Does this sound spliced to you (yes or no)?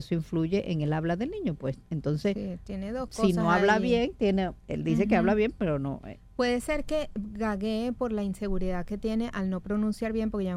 yes